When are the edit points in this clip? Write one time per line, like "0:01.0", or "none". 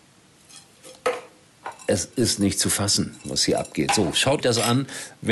0:04.4